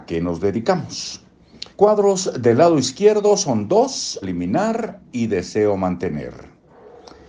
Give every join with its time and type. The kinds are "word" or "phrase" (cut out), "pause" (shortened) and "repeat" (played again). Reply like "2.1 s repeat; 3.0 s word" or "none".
1.7 s pause; 4.2 s word; 5.1 s pause